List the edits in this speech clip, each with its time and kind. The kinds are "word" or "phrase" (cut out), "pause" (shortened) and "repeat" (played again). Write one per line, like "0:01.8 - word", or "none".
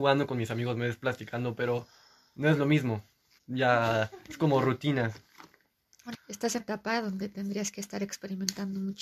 0:03.4 - word
0:06.1 - word
0:06.6 - word

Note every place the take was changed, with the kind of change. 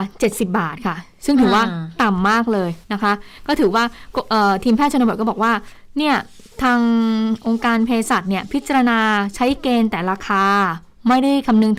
0:02.8 - pause

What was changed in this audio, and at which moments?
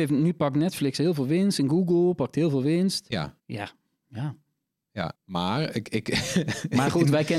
0:03.4 - pause
0:05.2 - pause

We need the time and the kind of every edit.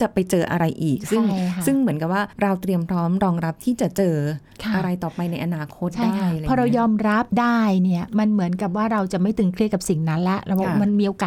0:02.3 - pause
0:07.3 - pause

